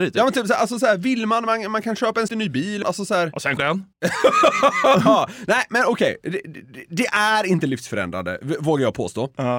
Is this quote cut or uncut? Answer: cut